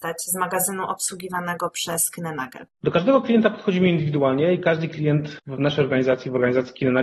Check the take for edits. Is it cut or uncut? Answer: cut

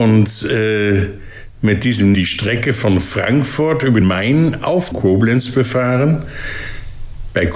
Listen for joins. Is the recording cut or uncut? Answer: cut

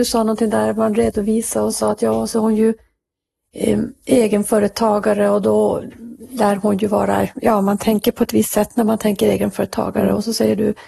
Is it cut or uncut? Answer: uncut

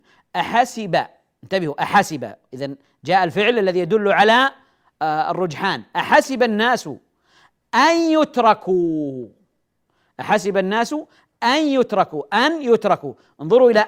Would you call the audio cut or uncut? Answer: uncut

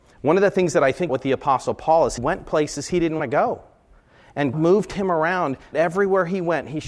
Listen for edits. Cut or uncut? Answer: cut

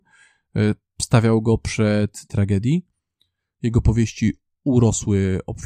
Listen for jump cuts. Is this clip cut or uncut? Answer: cut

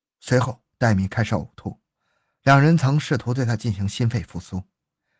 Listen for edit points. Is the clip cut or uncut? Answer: uncut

